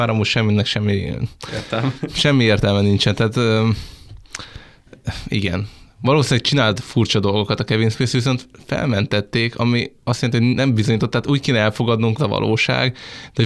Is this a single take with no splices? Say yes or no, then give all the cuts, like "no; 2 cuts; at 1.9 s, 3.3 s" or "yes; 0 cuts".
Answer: no; 1 cut; at 12.2 s